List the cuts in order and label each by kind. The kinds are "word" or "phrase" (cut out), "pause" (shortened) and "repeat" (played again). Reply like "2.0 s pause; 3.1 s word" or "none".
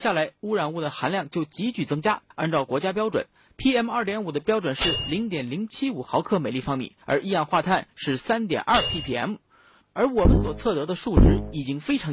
2.3 s pause; 7.0 s pause